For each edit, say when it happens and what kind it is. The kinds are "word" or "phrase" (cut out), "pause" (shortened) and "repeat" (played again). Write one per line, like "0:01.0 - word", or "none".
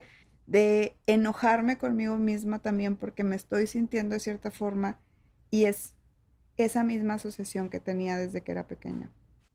none